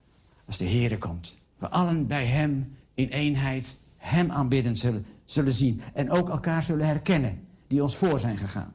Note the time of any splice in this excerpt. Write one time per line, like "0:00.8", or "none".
0:01.5
0:02.8